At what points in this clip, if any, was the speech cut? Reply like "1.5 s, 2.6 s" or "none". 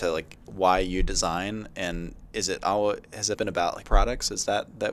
3.3 s, 3.8 s